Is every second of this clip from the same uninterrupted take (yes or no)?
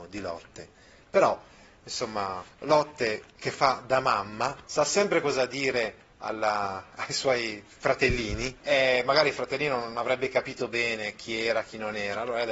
no